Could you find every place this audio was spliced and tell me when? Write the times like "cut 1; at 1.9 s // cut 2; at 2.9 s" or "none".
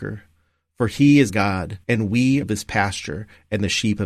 cut 1; at 1.3 s // cut 2; at 1.8 s // cut 3; at 2.4 s